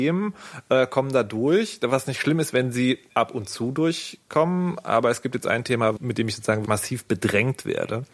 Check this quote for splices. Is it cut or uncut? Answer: cut